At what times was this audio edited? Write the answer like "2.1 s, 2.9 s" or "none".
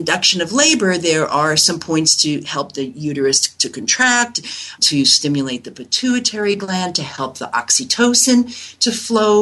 4.8 s